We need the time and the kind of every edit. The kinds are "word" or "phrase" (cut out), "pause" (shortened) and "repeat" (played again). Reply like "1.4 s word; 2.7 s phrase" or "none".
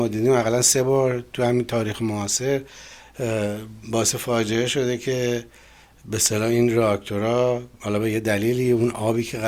none